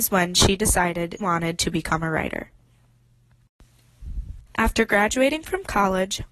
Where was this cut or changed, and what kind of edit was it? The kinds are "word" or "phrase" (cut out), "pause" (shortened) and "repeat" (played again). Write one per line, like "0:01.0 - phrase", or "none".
0:01.2 - word
0:04.5 - pause

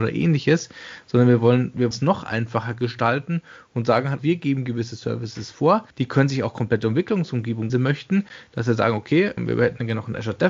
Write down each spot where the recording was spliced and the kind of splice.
0:01.9 - word
0:04.2 - word
0:05.9 - pause
0:07.7 - phrase
0:09.4 - word

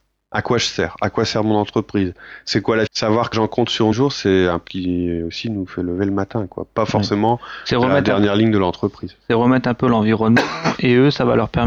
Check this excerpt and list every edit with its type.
0:02.9 - phrase
0:03.3 - word
0:03.9 - phrase
0:04.7 - word

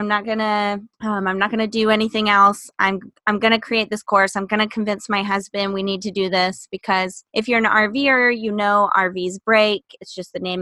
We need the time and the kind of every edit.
0:00.9 - pause
0:07.3 - pause

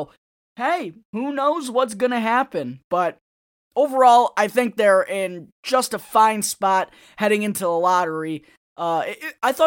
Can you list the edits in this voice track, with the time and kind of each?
none

